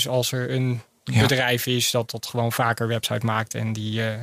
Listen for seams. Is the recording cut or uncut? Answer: uncut